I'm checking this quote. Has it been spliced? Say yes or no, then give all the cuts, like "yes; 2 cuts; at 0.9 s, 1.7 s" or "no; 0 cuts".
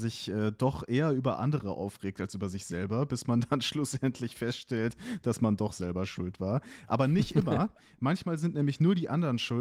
no; 0 cuts